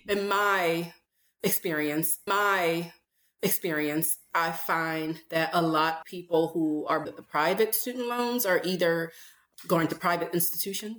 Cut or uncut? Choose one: cut